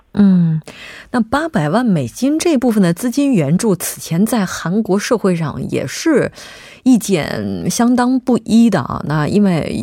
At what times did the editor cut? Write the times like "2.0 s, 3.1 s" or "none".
none